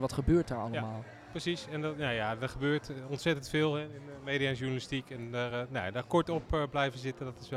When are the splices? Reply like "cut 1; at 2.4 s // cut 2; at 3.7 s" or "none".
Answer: none